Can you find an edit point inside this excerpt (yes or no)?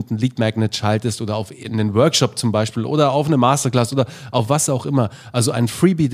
no